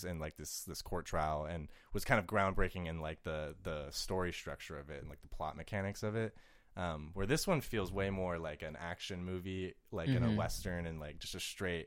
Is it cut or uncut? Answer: uncut